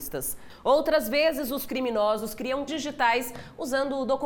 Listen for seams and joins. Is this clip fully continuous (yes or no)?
no